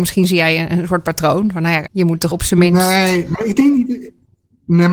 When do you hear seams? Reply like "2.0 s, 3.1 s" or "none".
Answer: 1.9 s, 2.3 s, 3.3 s